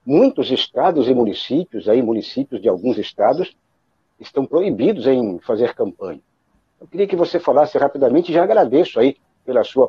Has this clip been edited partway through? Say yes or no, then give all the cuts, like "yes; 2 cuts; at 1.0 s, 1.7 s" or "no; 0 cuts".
no; 0 cuts